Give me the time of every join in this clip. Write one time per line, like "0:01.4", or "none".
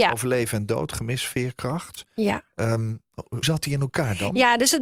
0:03.4